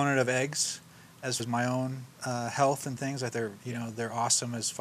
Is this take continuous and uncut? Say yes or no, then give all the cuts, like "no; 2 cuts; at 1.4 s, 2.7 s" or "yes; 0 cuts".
no; 4 cuts; at 1.4 s, 2.1 s, 3.0 s, 3.3 s